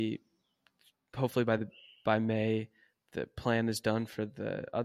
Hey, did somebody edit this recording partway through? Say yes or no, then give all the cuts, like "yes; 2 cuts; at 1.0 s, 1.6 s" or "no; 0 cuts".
no; 0 cuts